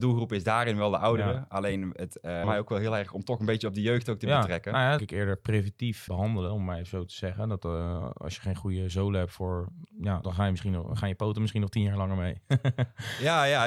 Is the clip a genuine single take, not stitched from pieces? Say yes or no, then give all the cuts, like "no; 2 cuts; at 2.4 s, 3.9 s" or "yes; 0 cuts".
no; 4 cuts; at 2.4 s, 5.0 s, 6.1 s, 10.2 s